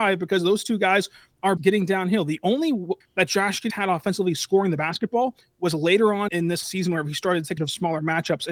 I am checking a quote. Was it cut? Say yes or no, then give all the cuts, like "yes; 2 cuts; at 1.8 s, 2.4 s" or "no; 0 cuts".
yes; 6 cuts; at 1.6 s, 3.0 s, 3.7 s, 6.3 s, 6.6 s, 7.6 s